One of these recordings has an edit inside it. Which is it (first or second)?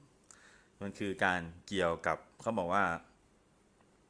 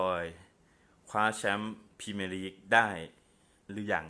first